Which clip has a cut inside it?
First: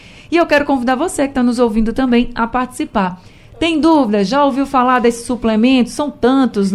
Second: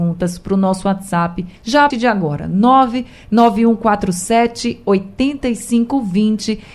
second; 2 cuts; at 1.6 s, 1.9 s

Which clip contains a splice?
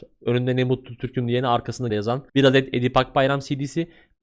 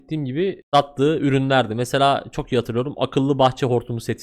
first; 2 cuts; at 1.9 s, 2.3 s

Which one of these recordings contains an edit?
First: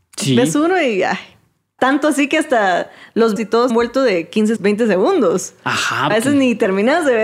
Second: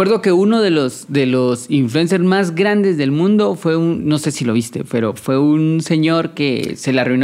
first; 5 cuts; at 1.8 s, 3.4 s, 3.7 s, 4.6 s, 6.1 s

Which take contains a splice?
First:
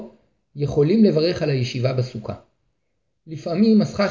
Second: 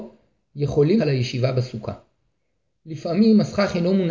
second; 1 cut; at 1.0 s

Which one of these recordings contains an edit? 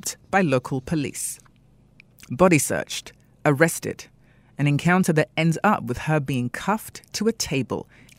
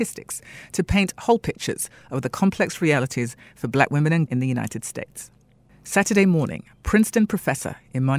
second; 1 cut; at 4.3 s

